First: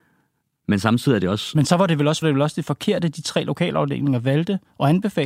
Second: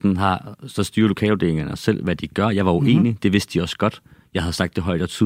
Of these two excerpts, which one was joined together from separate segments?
first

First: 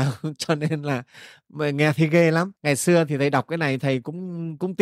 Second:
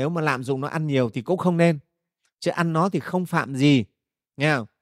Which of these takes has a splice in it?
first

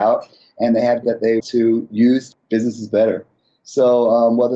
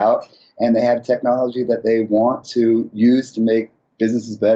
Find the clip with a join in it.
first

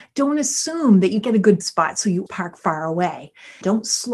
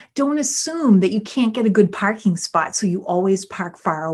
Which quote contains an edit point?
first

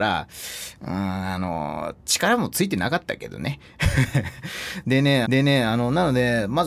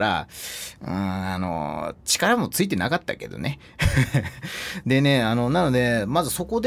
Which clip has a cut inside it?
first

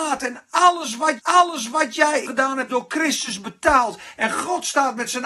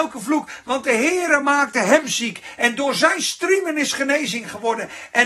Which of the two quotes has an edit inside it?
first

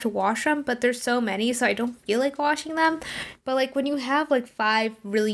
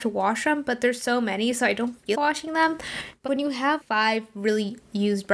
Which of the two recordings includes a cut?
second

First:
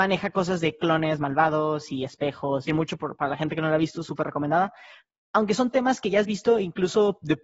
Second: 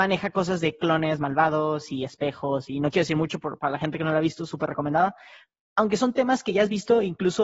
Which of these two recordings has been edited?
first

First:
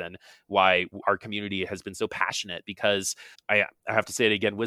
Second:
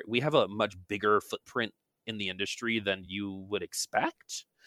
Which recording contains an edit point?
first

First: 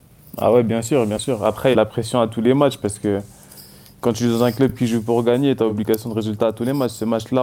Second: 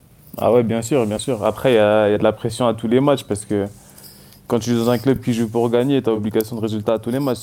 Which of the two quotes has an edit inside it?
first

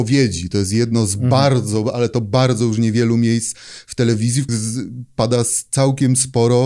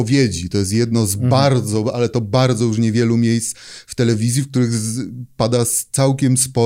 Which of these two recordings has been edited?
first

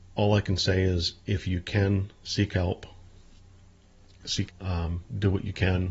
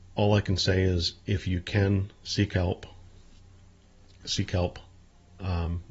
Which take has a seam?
first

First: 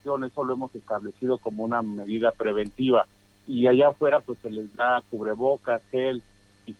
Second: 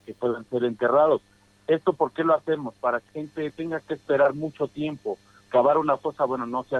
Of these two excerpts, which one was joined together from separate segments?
second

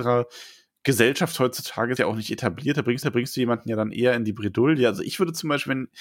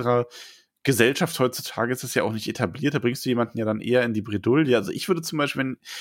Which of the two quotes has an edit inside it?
first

